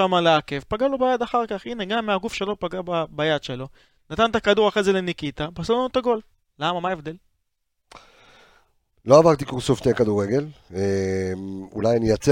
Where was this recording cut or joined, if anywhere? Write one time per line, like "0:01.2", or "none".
none